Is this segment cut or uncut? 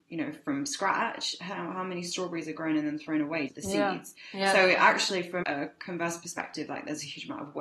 cut